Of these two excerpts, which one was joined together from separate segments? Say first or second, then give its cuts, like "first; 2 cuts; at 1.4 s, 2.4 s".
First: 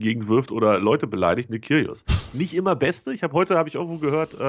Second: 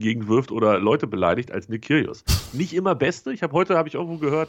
first; 1 cut; at 1.5 s